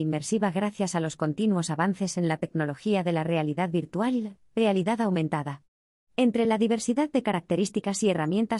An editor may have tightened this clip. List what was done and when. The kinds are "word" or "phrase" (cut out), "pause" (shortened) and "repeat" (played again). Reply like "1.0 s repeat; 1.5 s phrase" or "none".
none